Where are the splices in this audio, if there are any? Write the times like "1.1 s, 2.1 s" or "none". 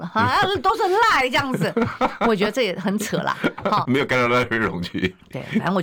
3.8 s